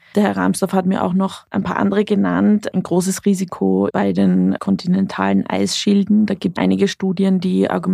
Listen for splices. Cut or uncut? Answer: cut